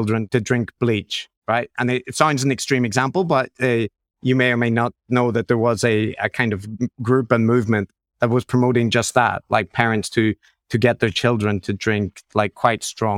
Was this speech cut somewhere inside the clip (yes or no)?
no